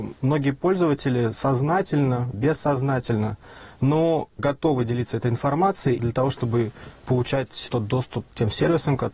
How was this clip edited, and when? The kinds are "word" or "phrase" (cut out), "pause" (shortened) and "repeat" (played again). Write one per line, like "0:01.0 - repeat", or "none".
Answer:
0:02.3 - word
0:06.0 - word